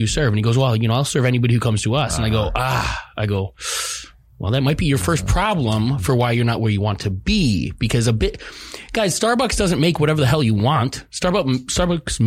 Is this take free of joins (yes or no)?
yes